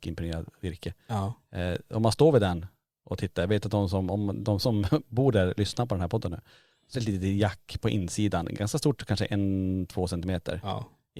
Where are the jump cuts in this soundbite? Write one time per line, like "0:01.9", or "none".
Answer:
0:06.9

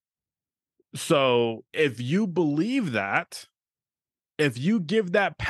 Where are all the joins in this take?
0:01.7

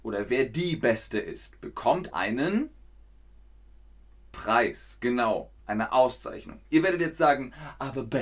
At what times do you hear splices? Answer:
0:02.1
0:05.6

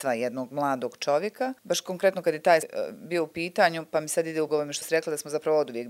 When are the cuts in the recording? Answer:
0:01.6
0:02.6
0:04.5
0:04.8

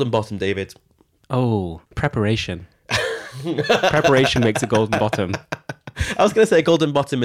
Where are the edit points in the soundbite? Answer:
0:01.8

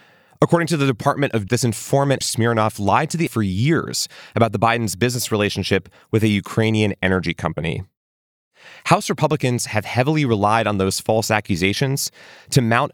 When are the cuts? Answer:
0:01.5
0:02.2
0:03.3

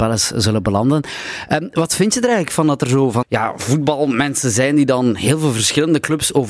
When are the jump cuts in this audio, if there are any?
0:03.2

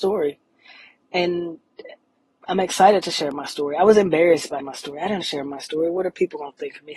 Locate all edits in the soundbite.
0:04.6
0:05.2

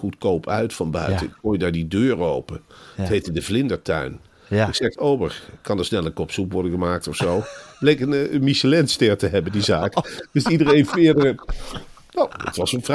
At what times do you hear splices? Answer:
0:05.0

